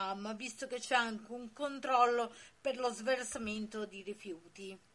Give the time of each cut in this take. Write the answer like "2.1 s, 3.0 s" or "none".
none